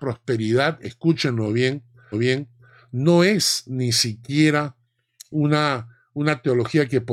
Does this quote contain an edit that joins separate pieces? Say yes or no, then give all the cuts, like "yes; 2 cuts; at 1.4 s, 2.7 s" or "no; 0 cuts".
yes; 1 cut; at 2.1 s